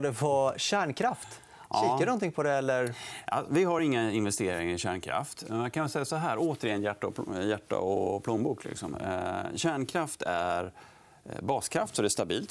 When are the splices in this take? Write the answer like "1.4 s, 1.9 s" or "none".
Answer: none